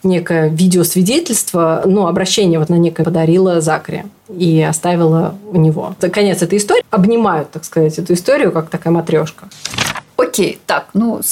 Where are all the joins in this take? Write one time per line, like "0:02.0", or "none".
0:02.7
0:03.0
0:06.8

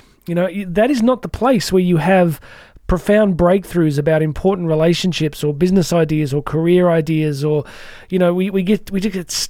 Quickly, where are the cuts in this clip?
none

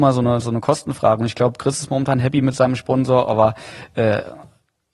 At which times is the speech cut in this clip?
none

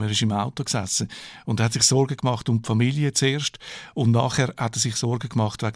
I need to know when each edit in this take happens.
none

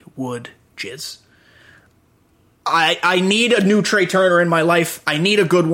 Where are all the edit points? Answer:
none

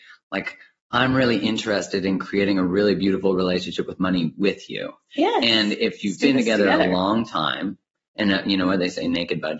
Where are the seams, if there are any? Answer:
none

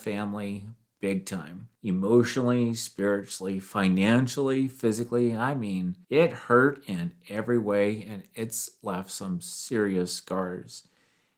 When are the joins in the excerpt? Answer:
0:01.7
0:06.0

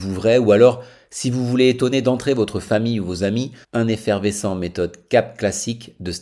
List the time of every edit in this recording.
0:03.6

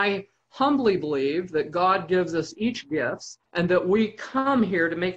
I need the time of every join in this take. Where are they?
0:03.5

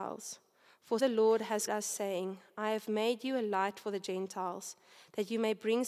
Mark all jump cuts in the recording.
0:01.0
0:01.7

